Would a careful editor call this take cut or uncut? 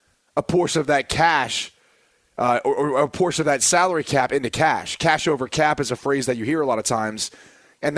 uncut